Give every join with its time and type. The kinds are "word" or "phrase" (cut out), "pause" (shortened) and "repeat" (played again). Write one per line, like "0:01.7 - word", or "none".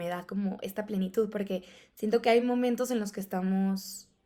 none